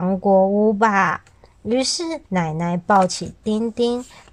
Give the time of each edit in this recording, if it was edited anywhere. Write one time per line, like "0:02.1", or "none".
0:02.3